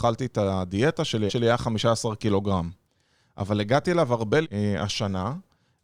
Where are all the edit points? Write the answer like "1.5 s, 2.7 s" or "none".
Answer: 1.3 s, 4.4 s